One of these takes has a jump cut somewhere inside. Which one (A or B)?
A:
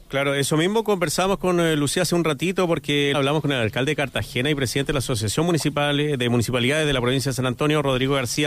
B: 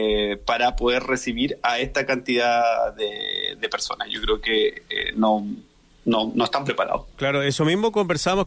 A